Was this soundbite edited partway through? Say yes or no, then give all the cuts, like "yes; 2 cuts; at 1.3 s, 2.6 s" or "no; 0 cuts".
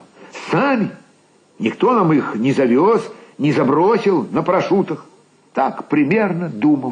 no; 0 cuts